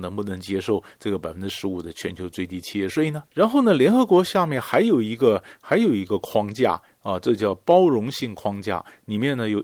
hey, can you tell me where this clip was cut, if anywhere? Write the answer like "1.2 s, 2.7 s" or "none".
3.3 s